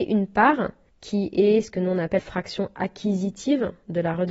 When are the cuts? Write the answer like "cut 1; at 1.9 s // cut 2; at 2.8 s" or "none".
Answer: cut 1; at 2.2 s